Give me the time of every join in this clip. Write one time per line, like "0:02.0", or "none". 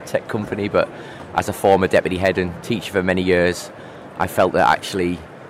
none